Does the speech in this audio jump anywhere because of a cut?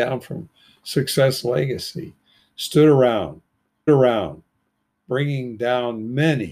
yes; 1 cut; at 3.9 s

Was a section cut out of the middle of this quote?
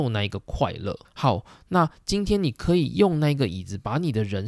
yes; 1 cut; at 1.0 s

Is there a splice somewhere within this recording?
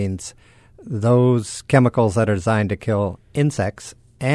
no; 0 cuts

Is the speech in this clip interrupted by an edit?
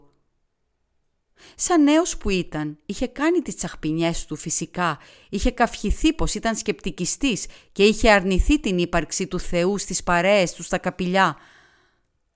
no; 0 cuts

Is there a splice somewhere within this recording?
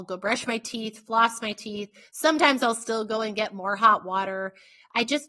no; 0 cuts

